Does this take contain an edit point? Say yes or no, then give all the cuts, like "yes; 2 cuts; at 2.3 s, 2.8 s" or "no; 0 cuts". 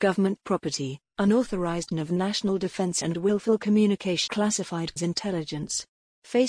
yes; 4 cuts; at 1.9 s, 3.0 s, 4.3 s, 5.0 s